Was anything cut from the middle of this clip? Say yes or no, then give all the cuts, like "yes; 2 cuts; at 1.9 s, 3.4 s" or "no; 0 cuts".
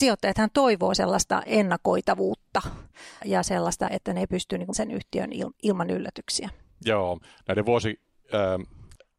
yes; 3 cuts; at 3.2 s, 3.9 s, 4.7 s